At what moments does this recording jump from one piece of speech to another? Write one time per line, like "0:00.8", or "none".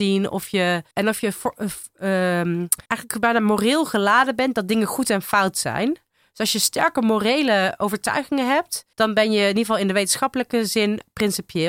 0:00.9
0:02.9
0:08.9